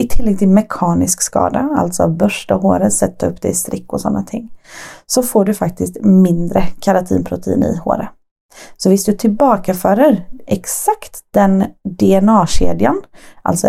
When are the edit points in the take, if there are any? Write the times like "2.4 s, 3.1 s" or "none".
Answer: none